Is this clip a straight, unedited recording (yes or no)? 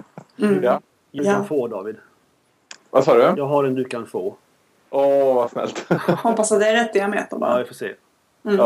no